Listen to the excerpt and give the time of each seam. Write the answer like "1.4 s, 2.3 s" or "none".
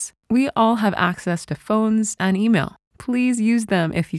2.2 s